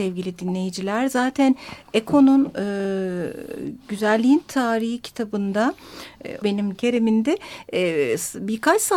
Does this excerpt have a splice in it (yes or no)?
yes